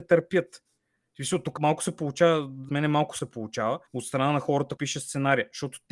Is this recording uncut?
no; 5 cuts; at 1.6 s, 2.7 s, 3.2 s, 3.9 s, 4.8 s

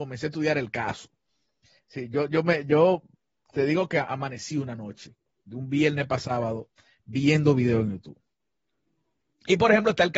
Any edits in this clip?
no; 0 cuts

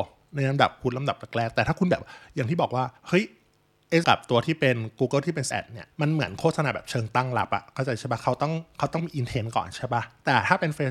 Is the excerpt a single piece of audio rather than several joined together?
no; 4 cuts; at 3.0 s, 4.0 s, 5.5 s, 5.9 s

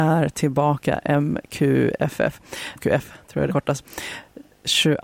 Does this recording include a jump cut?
yes; 2 cuts; at 2.8 s, 3.5 s

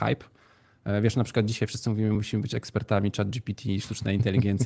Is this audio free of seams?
yes; 0 cuts

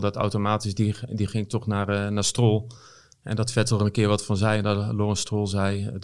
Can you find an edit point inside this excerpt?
no; 0 cuts

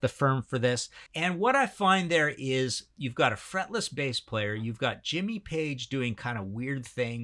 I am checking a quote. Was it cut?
yes; 1 cut; at 1.1 s

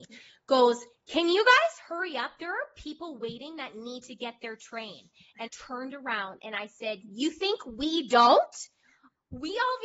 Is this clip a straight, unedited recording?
no; 1 cut; at 5.5 s

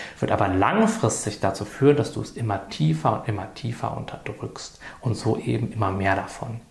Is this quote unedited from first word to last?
yes; 0 cuts

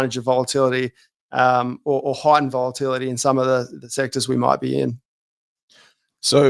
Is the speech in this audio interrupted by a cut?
no; 0 cuts

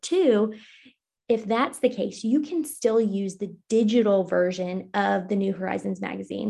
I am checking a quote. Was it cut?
no; 0 cuts

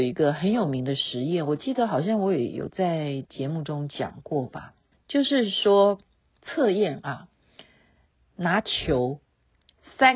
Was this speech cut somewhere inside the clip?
yes; 1 cut; at 4.9 s

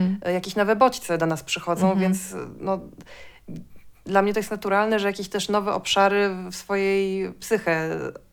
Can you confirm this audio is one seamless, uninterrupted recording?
yes; 0 cuts

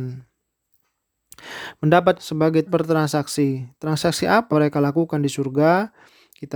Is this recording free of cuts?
no; 3 cuts; at 2.2 s, 2.7 s, 4.5 s

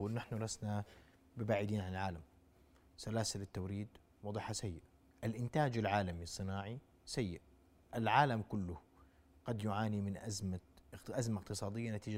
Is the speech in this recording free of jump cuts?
yes; 0 cuts

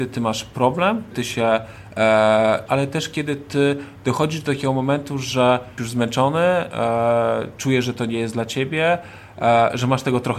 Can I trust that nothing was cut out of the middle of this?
no; 3 cuts; at 1.1 s, 2.7 s, 5.8 s

